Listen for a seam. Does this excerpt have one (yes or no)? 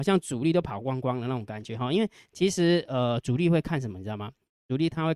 no